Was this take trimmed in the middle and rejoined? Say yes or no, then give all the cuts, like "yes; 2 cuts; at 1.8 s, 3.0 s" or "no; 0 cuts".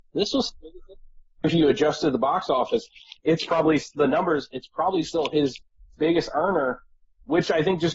no; 0 cuts